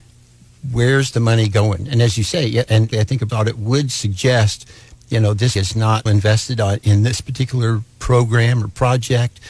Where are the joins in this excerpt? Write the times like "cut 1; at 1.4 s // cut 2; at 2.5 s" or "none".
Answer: cut 1; at 2.9 s // cut 2; at 3.3 s // cut 3; at 5.6 s // cut 4; at 6.1 s